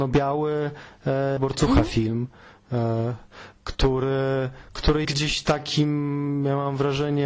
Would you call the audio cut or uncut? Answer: cut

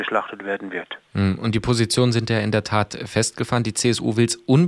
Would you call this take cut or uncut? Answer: cut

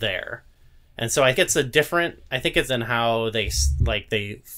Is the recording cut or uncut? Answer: cut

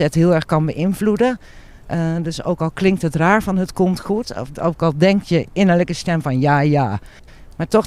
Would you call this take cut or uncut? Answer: uncut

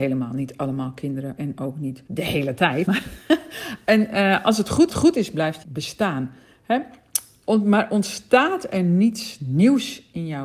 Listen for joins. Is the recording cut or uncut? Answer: cut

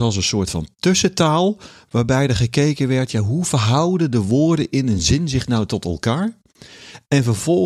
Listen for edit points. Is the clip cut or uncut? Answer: uncut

